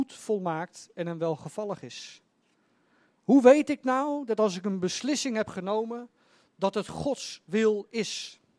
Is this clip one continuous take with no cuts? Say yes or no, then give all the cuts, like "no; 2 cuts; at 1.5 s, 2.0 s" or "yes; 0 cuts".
yes; 0 cuts